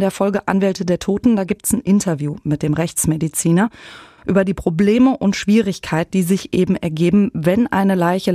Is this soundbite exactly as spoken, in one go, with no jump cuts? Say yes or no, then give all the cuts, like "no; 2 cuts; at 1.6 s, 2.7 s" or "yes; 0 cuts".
yes; 0 cuts